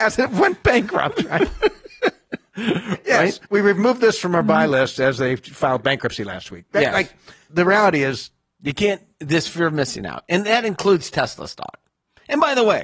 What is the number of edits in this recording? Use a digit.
2